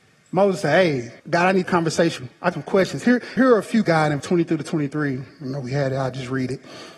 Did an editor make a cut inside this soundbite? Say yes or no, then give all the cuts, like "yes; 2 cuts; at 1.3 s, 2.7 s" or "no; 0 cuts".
yes; 7 cuts; at 1.2 s, 1.6 s, 2.2 s, 2.5 s, 3.4 s, 3.8 s, 4.2 s